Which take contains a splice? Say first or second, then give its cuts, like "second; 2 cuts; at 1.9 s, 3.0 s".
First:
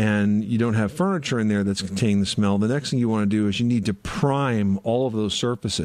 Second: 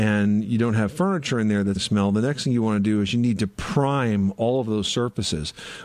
second; 1 cut; at 1.8 s